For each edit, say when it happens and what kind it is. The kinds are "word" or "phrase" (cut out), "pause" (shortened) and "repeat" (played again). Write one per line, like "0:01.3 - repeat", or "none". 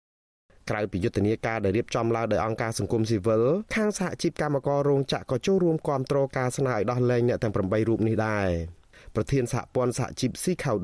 0:03.7 - pause